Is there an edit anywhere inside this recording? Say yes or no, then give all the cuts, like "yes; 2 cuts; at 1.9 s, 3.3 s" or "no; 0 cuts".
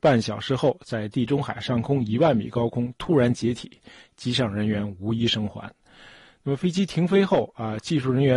no; 0 cuts